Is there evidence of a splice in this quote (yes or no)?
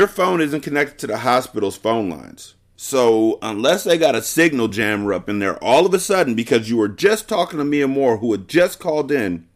no